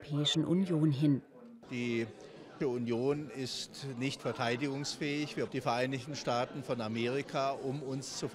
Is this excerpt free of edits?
no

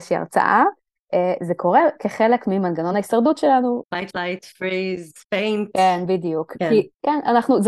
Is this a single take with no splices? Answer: yes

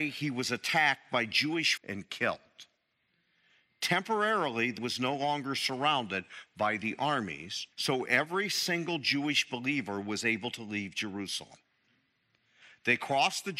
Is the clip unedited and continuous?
no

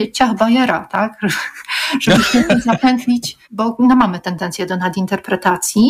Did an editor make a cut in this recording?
yes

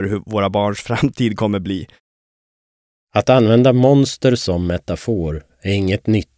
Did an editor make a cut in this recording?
no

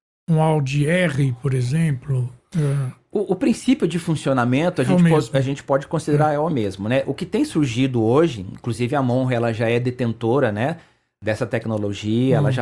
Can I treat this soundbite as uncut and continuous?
yes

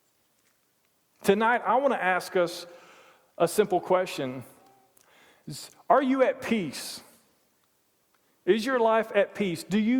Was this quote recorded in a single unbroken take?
yes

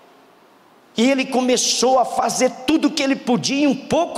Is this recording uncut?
yes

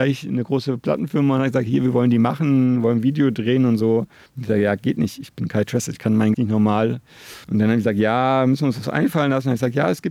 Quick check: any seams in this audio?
yes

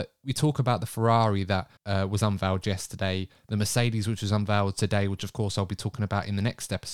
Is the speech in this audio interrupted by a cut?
yes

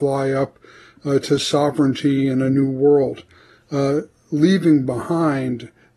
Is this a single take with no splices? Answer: yes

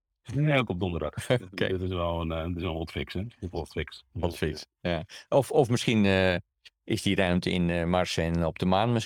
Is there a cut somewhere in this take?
yes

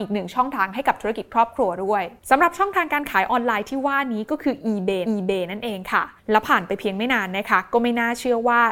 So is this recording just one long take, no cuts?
no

